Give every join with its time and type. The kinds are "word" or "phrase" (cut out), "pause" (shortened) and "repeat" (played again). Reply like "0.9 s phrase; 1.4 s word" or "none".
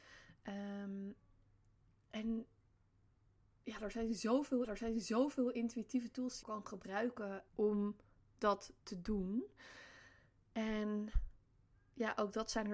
4.6 s repeat; 6.4 s phrase; 7.5 s word